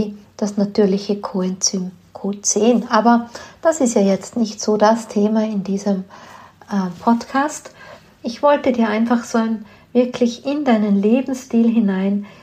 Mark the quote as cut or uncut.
uncut